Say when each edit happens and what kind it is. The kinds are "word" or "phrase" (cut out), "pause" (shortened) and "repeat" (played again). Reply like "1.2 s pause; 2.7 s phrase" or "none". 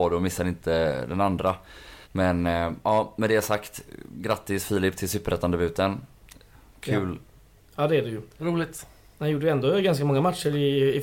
2.0 s pause; 8.3 s pause